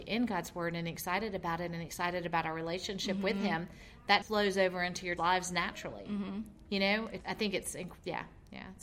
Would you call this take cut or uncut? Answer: cut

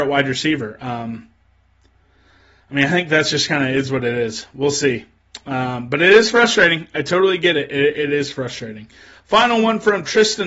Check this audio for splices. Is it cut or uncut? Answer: uncut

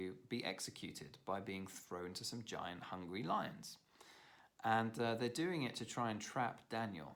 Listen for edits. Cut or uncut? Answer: uncut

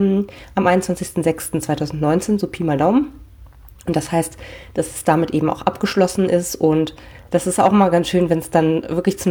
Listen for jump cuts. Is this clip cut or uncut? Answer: uncut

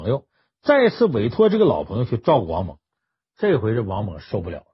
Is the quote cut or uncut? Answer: uncut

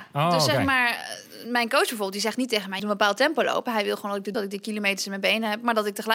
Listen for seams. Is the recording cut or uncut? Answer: cut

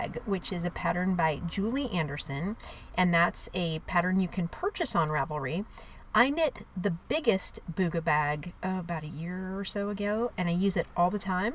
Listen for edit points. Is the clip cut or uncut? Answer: cut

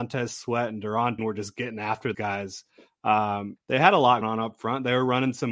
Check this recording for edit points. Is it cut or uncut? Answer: cut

